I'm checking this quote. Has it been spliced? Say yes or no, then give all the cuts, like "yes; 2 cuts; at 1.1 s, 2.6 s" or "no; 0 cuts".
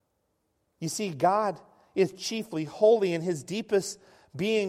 no; 0 cuts